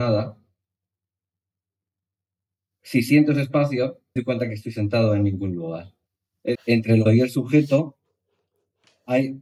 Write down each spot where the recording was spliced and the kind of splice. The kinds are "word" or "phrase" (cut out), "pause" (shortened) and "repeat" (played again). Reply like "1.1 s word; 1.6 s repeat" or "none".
4.2 s word; 6.5 s word; 7.1 s word